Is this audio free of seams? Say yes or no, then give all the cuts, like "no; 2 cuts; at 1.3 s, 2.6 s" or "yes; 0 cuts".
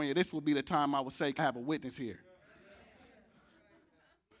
no; 1 cut; at 1.4 s